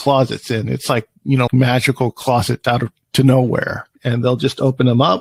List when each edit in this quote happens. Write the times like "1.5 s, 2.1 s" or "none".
1.5 s, 2.6 s, 4.0 s